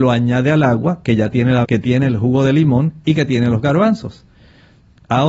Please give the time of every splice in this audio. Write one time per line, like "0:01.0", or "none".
0:01.6